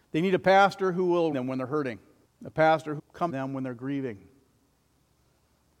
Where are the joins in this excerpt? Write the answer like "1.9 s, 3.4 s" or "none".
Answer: 1.3 s, 2.2 s, 3.0 s, 3.3 s